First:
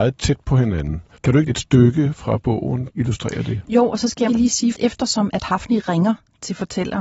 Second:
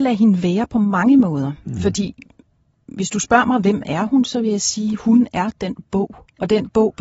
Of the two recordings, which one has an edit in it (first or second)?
first